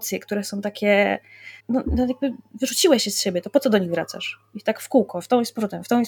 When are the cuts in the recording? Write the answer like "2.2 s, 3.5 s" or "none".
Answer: 1.6 s